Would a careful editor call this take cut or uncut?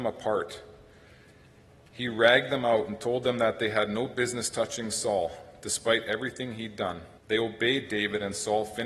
cut